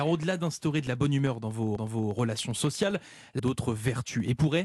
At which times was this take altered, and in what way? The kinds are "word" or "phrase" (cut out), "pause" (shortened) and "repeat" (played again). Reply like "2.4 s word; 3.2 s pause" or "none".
1.8 s repeat; 3.4 s phrase